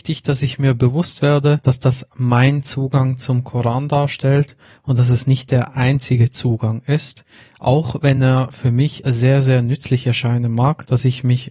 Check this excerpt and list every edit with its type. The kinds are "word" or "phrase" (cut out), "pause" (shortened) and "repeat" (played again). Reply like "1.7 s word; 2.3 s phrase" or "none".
none